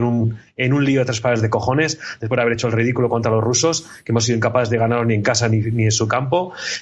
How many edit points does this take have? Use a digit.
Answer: 0